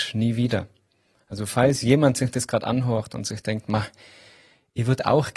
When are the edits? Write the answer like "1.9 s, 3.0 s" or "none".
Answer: none